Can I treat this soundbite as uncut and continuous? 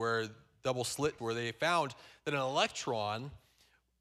no; 1 cut; at 1.2 s

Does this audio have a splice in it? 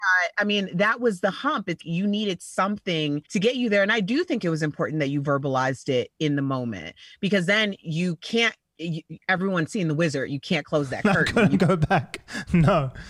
yes; 2 cuts; at 1.8 s, 3.2 s

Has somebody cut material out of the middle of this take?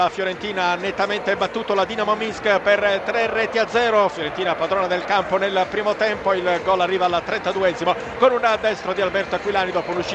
no; 0 cuts

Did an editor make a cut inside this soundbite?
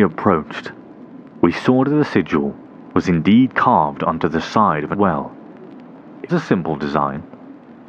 yes; 2 cuts; at 4.9 s, 6.3 s

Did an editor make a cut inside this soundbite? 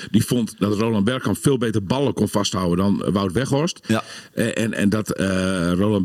yes; 1 cut; at 4.7 s

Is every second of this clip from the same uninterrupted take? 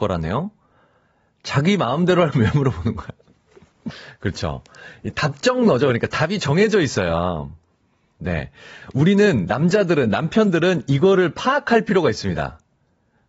no; 1 cut; at 2.3 s

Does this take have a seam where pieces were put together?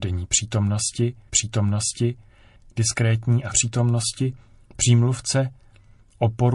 yes; 3 cuts; at 1.3 s, 3.5 s, 4.5 s

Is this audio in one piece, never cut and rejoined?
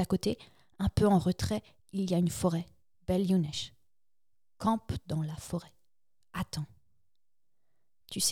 yes; 0 cuts

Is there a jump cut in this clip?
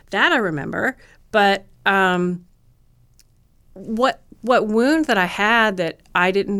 no; 0 cuts

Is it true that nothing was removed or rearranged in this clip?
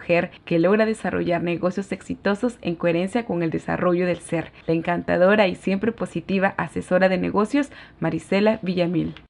yes; 0 cuts

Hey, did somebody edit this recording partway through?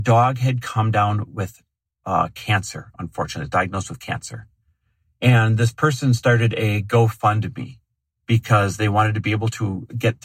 no; 0 cuts

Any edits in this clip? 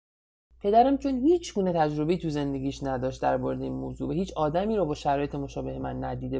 no; 0 cuts

